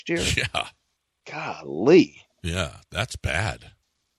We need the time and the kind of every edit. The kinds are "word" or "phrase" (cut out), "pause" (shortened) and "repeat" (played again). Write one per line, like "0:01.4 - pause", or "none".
0:02.3 - pause